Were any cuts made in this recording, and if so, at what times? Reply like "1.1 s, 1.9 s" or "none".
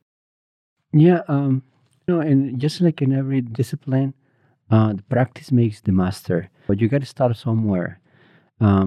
2.1 s, 6.7 s